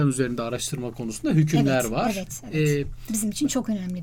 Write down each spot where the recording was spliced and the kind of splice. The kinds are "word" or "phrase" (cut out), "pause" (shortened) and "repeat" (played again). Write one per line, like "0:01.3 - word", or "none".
none